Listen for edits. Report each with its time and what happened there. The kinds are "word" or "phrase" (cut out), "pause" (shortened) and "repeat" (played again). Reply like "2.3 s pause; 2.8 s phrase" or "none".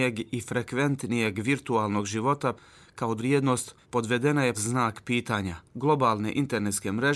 2.6 s word; 3.2 s word; 3.8 s pause; 4.5 s word; 5.7 s pause